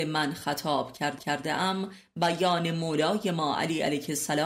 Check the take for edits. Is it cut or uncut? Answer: cut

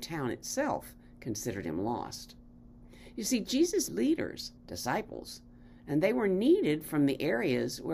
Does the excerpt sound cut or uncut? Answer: cut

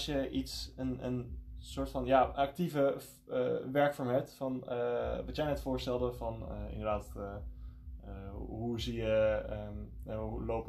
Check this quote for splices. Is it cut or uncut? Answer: uncut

